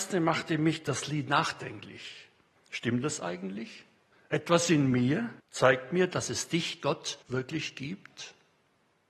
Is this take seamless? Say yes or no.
no